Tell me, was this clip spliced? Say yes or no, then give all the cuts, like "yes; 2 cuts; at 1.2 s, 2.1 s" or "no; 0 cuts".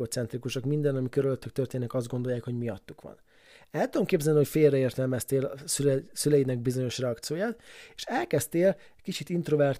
no; 0 cuts